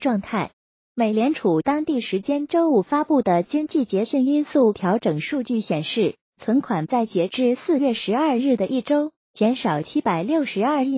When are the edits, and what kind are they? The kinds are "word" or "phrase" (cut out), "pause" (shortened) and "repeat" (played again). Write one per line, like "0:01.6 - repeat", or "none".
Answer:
none